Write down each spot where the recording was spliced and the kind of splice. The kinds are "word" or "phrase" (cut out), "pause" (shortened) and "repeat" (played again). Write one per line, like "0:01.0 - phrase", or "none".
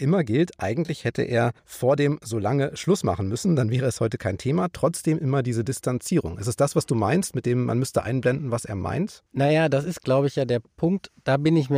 0:01.6 - pause
0:09.3 - pause